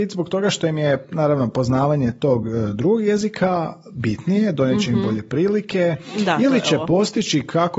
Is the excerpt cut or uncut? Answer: uncut